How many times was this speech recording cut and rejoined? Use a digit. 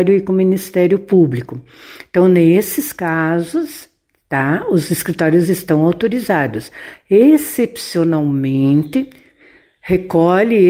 0